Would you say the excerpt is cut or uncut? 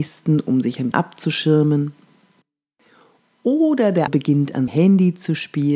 cut